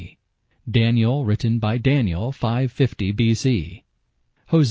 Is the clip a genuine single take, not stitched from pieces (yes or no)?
yes